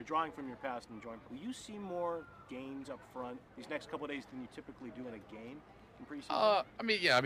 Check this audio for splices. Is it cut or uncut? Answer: cut